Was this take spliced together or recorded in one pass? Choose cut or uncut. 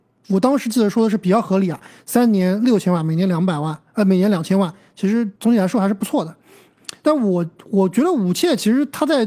cut